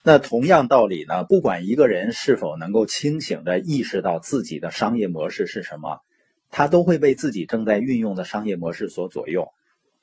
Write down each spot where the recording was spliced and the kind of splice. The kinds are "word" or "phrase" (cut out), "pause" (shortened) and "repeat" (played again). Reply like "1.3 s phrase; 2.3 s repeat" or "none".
none

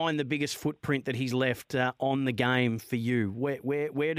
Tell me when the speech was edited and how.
none

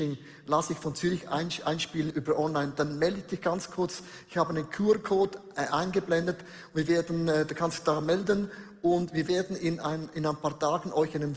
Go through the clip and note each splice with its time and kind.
2.1 s word

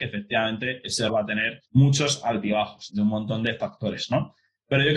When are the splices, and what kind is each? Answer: 1.1 s word; 1.7 s pause; 2.9 s phrase

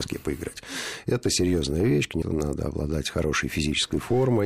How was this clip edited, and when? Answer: 2.2 s phrase

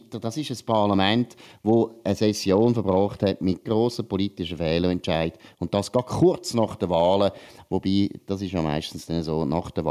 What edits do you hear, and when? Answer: 3.7 s word

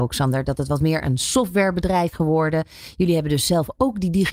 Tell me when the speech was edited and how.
2.1 s word

